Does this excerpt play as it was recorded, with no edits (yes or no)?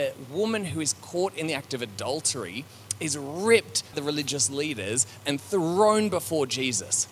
no